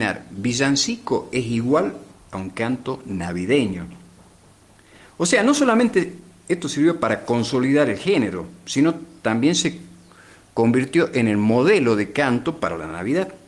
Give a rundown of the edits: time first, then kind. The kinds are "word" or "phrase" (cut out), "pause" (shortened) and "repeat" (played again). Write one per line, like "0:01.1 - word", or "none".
none